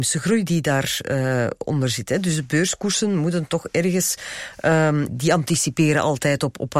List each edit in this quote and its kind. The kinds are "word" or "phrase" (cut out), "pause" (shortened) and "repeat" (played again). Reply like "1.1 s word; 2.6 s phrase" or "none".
5.1 s word